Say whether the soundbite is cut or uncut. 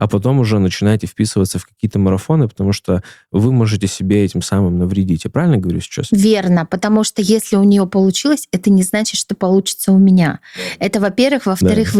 uncut